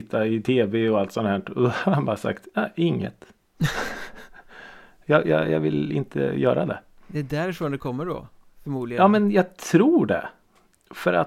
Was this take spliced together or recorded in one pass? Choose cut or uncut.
uncut